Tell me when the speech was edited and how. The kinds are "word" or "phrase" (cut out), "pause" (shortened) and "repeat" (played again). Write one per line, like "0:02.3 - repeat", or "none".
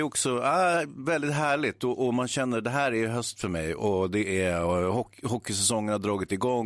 none